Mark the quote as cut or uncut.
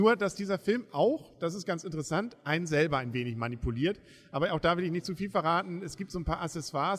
uncut